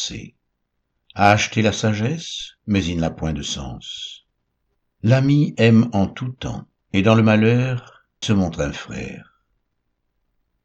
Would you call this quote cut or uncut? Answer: cut